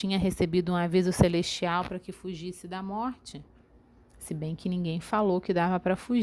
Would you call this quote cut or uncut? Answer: uncut